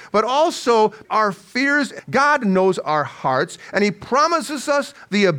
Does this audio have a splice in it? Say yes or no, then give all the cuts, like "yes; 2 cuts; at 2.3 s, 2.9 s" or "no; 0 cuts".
yes; 2 cuts; at 1.0 s, 2.0 s